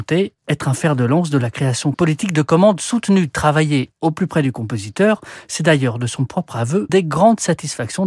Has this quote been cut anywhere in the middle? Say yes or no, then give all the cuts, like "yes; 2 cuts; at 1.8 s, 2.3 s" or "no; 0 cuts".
yes; 2 cuts; at 1.9 s, 6.9 s